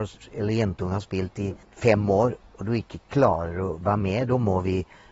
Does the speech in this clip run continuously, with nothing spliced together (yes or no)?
no